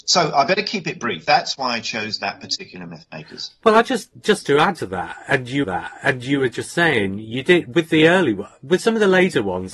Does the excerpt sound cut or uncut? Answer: cut